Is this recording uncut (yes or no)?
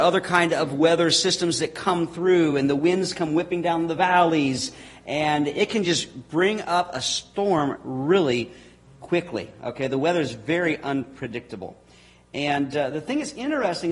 yes